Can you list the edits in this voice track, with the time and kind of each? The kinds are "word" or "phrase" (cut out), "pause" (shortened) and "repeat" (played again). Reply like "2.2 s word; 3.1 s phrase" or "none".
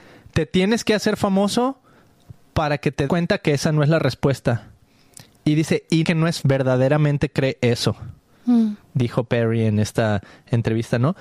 3.1 s word; 6.0 s word; 6.4 s word

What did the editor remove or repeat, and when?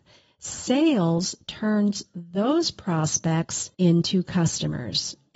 3.7 s pause

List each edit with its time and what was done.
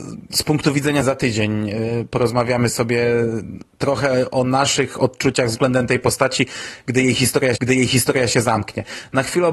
1.0 s word; 7.6 s repeat

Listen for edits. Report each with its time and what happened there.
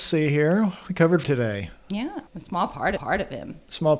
1.2 s word; 2.3 s pause; 3.0 s repeat

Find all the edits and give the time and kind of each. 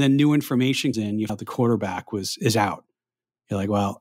0.9 s word; 1.3 s word

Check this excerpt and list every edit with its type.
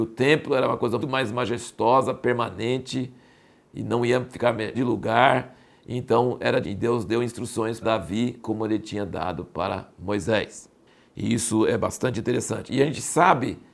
1.0 s word; 4.7 s word; 6.6 s word; 7.8 s word; 8.4 s word

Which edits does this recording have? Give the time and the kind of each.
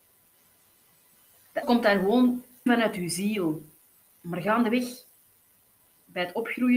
1.6 s word; 2.7 s word

